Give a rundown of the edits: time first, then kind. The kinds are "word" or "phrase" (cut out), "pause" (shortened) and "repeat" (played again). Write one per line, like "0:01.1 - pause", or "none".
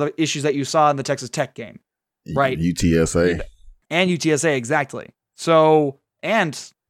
none